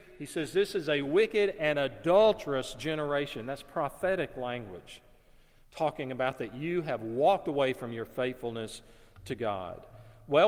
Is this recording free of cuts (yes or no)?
yes